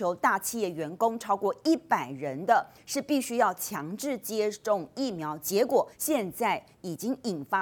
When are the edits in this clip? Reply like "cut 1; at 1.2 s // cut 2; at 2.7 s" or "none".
cut 1; at 5.9 s